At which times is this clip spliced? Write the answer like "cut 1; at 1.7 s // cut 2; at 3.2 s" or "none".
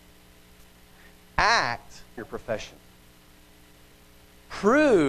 cut 1; at 2.2 s